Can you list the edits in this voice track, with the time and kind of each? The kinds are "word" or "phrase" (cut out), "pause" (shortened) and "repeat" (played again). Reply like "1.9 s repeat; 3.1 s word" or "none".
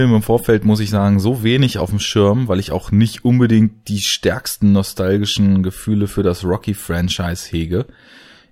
none

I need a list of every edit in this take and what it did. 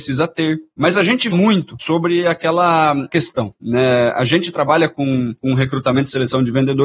1.3 s word

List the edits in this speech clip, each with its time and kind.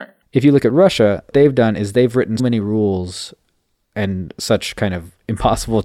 1.3 s word; 2.4 s word

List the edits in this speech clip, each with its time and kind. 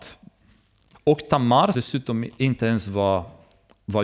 0.9 s phrase; 1.7 s word

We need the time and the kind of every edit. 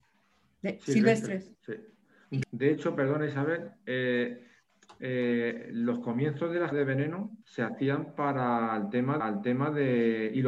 1.5 s pause; 2.4 s word; 6.7 s word; 7.4 s pause; 9.2 s repeat

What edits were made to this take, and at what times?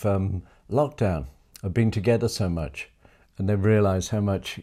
1.4 s pause

